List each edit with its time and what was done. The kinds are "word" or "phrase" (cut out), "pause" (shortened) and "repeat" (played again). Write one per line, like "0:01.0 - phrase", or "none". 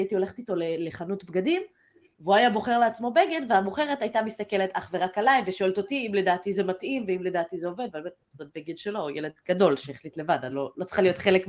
none